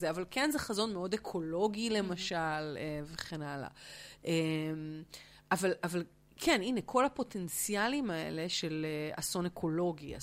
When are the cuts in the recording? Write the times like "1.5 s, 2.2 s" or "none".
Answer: none